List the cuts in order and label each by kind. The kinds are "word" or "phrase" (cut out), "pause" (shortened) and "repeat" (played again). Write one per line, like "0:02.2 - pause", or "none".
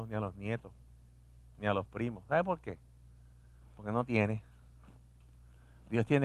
none